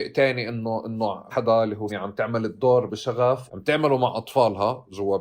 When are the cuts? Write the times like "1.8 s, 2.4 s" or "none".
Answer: 1.3 s, 1.9 s, 2.9 s, 3.5 s